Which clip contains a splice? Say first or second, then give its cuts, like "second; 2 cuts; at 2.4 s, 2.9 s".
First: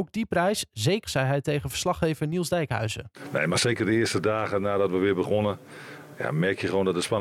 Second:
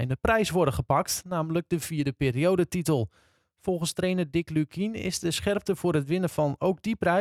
first; 1 cut; at 1.0 s